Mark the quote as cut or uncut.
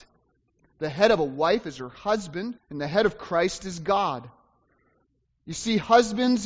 cut